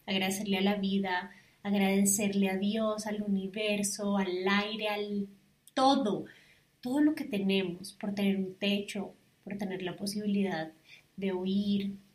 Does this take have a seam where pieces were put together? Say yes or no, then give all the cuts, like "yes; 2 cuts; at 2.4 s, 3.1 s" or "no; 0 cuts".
no; 0 cuts